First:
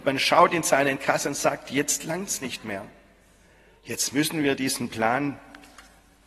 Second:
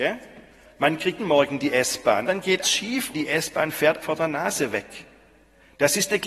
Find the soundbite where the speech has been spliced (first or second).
second